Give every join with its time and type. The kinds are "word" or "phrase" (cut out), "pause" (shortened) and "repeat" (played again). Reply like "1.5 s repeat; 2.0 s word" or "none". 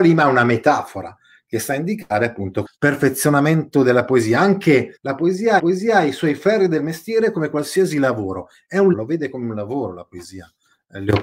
2.7 s word; 5.0 s pause; 5.6 s repeat; 8.9 s word